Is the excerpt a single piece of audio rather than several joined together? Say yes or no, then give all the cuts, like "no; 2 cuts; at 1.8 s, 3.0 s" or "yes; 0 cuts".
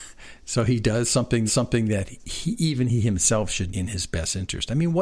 no; 2 cuts; at 1.5 s, 3.7 s